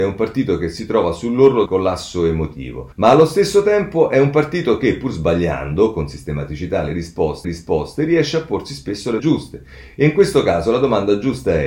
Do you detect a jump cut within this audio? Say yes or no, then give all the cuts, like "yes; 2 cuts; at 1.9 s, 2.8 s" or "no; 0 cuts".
yes; 4 cuts; at 1.7 s, 2.9 s, 7.4 s, 9.2 s